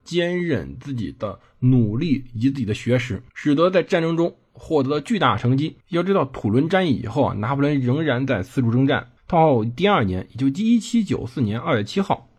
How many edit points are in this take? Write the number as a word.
three